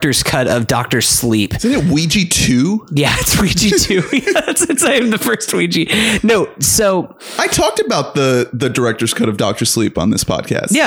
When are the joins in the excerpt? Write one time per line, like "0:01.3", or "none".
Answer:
none